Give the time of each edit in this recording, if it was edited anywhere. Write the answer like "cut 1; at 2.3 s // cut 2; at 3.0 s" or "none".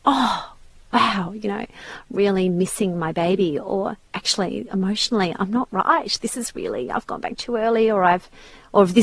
none